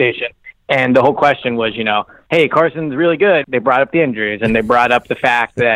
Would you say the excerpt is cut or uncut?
cut